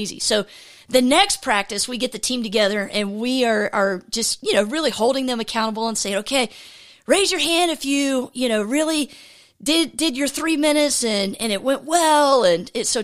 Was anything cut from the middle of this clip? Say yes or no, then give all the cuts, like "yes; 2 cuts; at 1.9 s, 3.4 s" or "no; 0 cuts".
no; 0 cuts